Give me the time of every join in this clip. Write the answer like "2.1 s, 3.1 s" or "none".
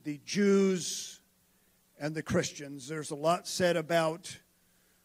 none